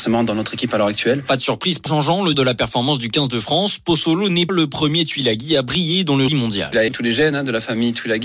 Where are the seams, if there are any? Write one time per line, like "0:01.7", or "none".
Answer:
0:01.9
0:02.3
0:04.5
0:06.3
0:06.9